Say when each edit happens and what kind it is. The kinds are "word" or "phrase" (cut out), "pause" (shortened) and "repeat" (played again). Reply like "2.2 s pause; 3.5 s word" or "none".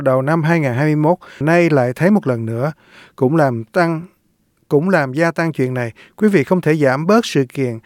1.4 s word